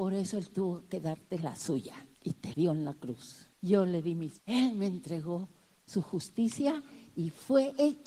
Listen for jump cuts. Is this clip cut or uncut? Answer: cut